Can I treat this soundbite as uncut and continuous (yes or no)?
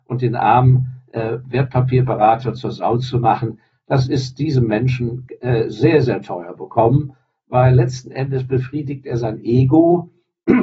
yes